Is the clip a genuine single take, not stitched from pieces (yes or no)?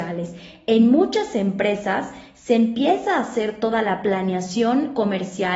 yes